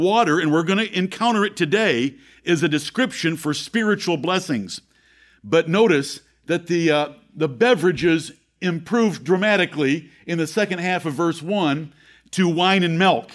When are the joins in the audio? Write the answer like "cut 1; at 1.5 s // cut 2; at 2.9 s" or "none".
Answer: none